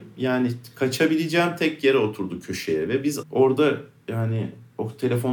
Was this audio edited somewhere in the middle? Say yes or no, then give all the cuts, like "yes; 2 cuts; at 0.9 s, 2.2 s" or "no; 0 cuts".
yes; 1 cut; at 3.2 s